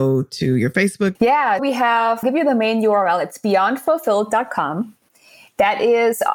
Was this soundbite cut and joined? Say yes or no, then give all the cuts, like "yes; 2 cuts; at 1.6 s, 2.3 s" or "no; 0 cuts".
yes; 3 cuts; at 1.1 s, 1.6 s, 2.2 s